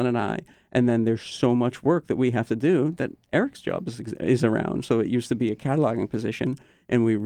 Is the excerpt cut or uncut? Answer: uncut